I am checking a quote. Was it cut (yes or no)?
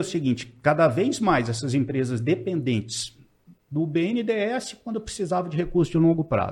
no